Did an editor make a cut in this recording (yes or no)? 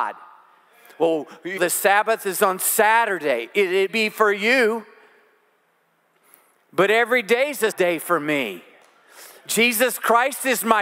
yes